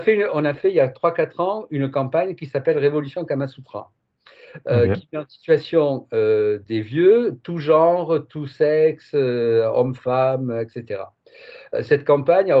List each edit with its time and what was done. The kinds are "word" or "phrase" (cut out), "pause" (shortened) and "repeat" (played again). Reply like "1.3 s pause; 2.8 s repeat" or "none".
none